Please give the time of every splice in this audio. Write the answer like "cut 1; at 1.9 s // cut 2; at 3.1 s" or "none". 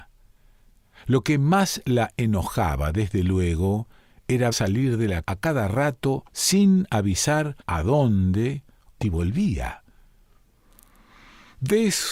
cut 1; at 4.5 s // cut 2; at 5.2 s // cut 3; at 6.3 s // cut 4; at 7.6 s // cut 5; at 9.0 s